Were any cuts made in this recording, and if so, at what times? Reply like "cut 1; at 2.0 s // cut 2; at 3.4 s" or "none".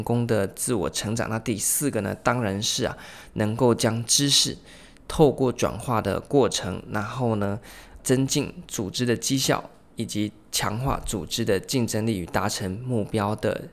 cut 1; at 8.0 s